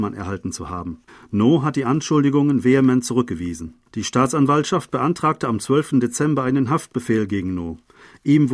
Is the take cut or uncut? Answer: cut